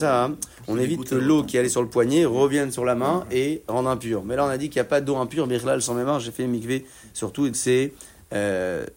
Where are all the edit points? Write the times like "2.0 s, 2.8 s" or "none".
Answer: 7.5 s